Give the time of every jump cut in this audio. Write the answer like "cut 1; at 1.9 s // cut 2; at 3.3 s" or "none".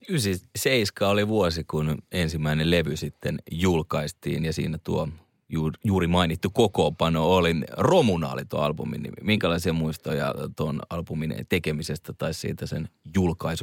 none